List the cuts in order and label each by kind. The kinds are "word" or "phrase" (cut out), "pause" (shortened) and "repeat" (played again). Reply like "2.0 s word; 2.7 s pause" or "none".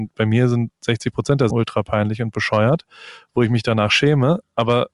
1.5 s word